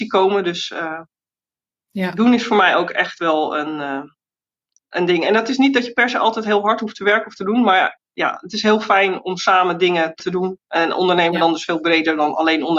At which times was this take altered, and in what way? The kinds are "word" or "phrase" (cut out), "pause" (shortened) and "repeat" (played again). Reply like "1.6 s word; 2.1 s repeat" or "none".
10.2 s word